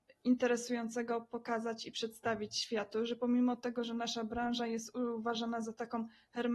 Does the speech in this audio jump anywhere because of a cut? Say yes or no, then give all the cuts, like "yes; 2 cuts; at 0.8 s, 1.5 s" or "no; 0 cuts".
no; 0 cuts